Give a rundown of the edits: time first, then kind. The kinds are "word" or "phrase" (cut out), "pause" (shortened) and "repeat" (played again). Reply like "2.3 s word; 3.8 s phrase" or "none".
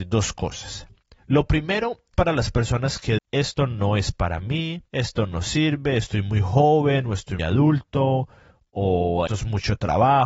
1.2 s pause; 2.1 s word; 3.2 s word; 4.9 s pause; 7.4 s word; 9.3 s word